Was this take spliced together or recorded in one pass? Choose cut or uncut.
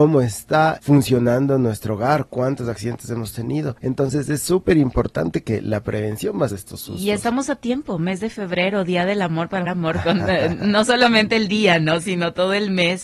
cut